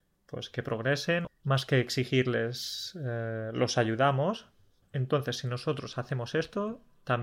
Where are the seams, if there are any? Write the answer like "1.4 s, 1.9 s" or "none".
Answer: none